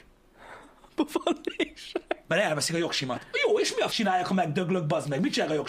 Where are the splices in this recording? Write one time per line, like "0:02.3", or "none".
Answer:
0:03.9

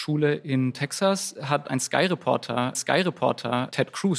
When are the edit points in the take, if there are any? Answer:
0:01.6
0:02.7

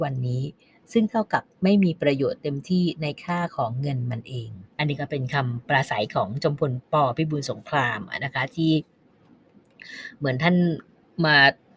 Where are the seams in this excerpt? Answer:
0:04.7
0:06.8

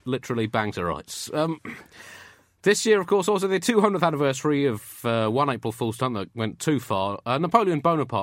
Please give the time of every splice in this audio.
none

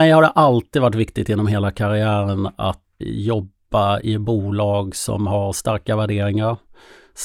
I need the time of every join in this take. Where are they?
0:03.0

